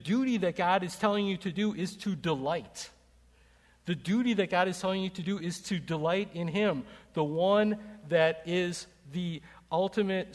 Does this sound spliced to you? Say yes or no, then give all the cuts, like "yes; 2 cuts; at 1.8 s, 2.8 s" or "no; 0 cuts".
no; 0 cuts